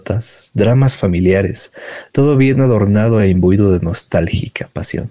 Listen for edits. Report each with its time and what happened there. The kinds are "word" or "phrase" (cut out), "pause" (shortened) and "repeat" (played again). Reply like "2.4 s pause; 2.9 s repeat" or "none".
none